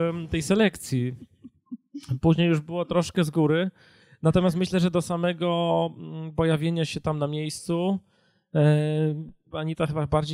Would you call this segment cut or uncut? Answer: uncut